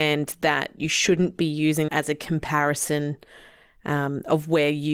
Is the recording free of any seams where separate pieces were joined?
no; 1 cut; at 1.9 s

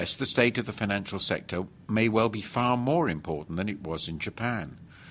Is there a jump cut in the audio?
no; 0 cuts

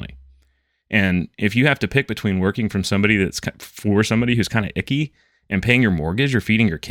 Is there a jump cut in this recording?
no; 0 cuts

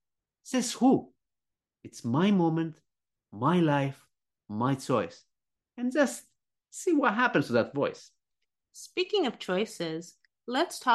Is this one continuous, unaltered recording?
yes; 0 cuts

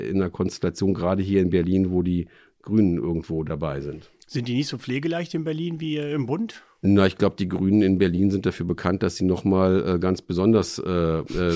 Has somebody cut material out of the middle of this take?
no; 0 cuts

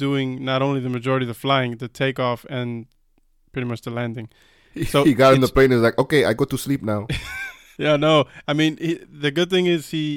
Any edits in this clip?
no; 0 cuts

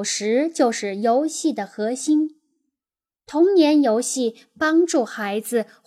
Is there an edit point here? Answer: no; 0 cuts

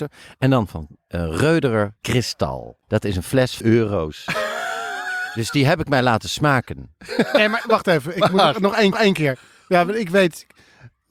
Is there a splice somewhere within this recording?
yes; 5 cuts; at 2.0 s, 2.8 s, 3.6 s, 7.6 s, 8.9 s

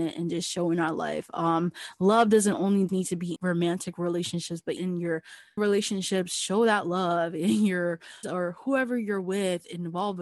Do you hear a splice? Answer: yes; 5 cuts; at 2.9 s, 3.4 s, 4.8 s, 5.6 s, 8.2 s

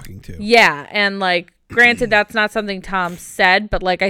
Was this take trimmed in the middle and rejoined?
no; 0 cuts

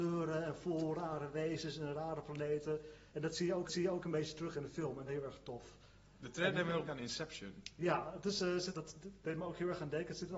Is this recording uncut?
no; 5 cuts; at 3.1 s, 3.7 s, 5.1 s, 6.9 s, 8.7 s

